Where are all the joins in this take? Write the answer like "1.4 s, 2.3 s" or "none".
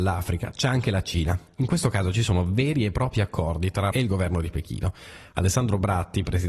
3.9 s